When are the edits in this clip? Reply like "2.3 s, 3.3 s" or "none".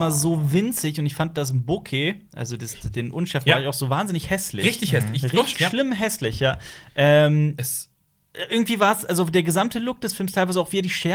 5.5 s